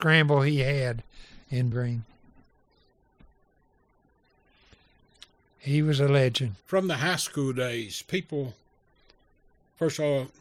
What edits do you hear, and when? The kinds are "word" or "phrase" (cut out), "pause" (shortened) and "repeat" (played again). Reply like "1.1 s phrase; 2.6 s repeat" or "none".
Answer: 1.7 s word; 6.6 s pause

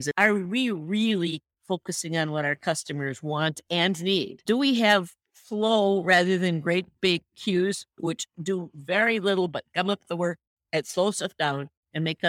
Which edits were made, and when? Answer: none

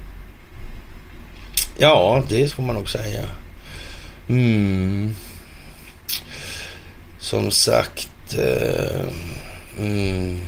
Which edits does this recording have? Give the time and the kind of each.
2.5 s word

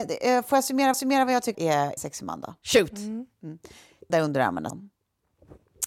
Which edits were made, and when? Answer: 0.9 s repeat; 1.5 s word; 2.0 s phrase; 2.6 s pause; 3.3 s pause; 4.1 s phrase; 4.7 s phrase

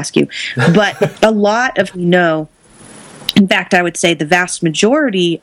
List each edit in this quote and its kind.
1.1 s word; 1.9 s word

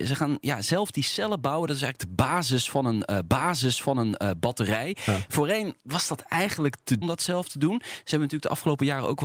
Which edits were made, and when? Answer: 3.3 s repeat; 5.8 s pause; 7.0 s phrase

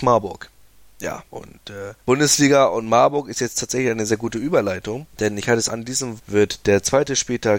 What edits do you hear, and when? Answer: 1.3 s pause; 2.0 s pause; 4.1 s word; 5.1 s pause; 5.7 s word; 6.2 s word

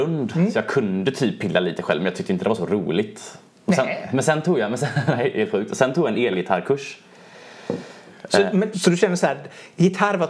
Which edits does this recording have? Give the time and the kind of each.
8.7 s word

